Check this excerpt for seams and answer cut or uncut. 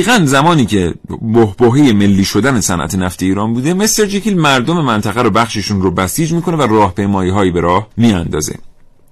cut